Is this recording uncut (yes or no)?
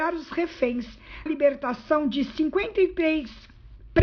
no